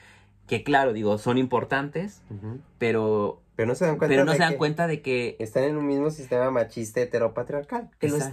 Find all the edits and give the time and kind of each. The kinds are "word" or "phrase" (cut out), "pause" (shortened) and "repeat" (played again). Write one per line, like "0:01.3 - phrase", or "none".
0:02.7 - pause